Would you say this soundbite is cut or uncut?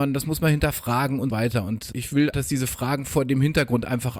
cut